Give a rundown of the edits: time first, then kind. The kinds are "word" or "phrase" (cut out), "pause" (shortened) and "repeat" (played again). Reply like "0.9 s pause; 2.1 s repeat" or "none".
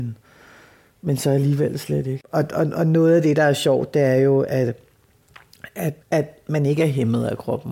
6.0 s pause

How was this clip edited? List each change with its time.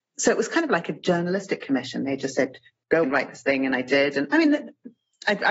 3.0 s word

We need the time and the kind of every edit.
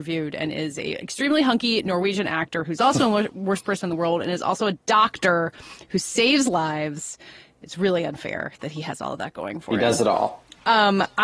none

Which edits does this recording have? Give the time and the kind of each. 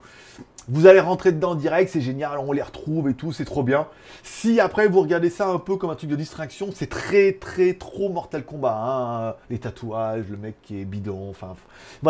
9.4 s pause

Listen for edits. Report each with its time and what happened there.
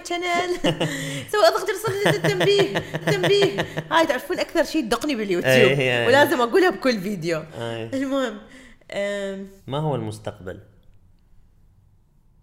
1.7 s word; 3.0 s repeat; 9.6 s pause

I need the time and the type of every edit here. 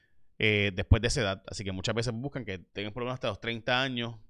2.7 s pause

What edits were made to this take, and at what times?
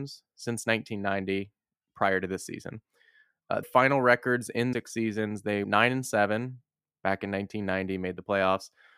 3.6 s word; 4.7 s word; 5.6 s word

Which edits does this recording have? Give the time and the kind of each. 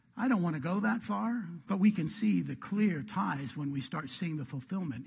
none

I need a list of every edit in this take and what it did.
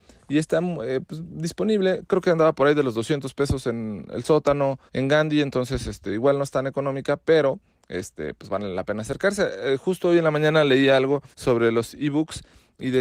4.9 s pause; 11.3 s pause

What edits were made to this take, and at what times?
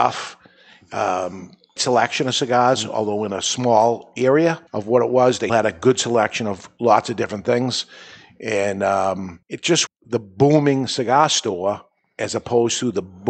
1.8 s word; 4.7 s pause; 5.5 s word; 9.4 s pause; 9.9 s word

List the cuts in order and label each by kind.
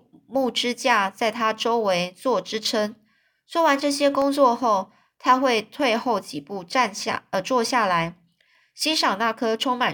none

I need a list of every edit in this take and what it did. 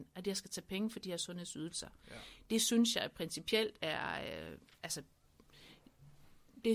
none

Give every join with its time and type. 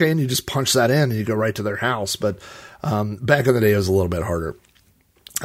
none

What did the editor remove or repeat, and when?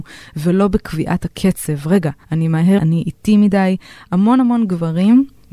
2.2 s pause; 2.8 s word

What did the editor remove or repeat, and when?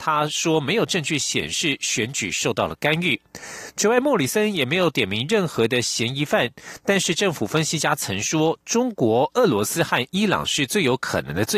3.3 s pause

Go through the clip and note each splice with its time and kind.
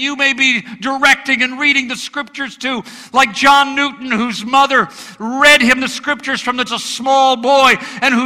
6.7 s phrase

